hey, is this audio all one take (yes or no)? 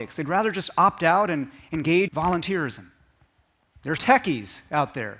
no